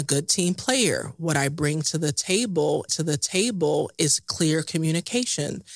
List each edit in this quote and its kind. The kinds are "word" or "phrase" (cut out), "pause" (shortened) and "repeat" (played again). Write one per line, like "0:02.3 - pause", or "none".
0:02.9 - repeat

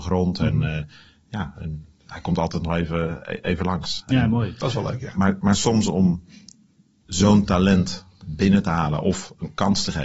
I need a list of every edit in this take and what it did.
none

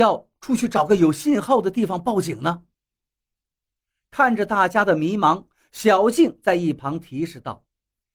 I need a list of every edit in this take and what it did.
none

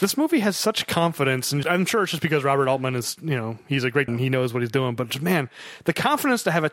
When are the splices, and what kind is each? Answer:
0:01.6 - word
0:04.1 - phrase

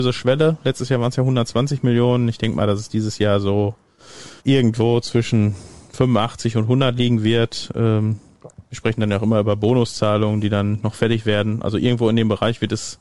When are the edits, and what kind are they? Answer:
0:04.4 - pause

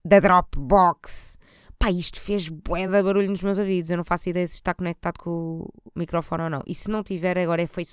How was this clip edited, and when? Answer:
none

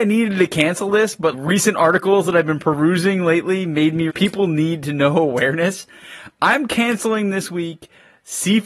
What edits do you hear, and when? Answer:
0:01.3 - word
0:04.1 - phrase

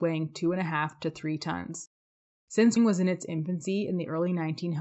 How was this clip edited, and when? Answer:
0:02.8 - word

